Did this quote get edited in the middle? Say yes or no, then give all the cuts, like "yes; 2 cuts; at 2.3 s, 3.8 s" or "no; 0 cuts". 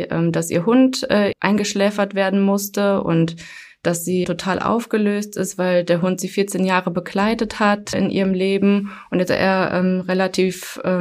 yes; 4 cuts; at 1.3 s, 4.2 s, 7.9 s, 9.3 s